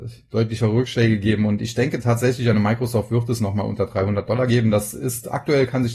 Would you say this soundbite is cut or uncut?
uncut